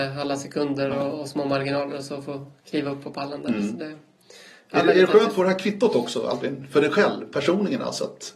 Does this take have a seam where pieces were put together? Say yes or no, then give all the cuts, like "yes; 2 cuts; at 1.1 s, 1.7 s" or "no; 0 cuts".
no; 0 cuts